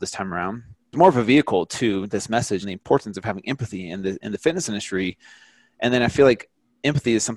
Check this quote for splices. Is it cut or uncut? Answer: cut